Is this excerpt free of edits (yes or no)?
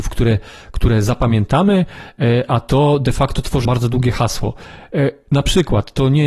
no